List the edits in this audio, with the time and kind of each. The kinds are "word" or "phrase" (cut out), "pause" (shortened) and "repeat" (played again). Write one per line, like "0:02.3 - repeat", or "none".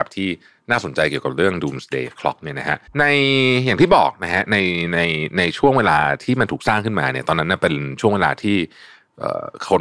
0:02.9 - pause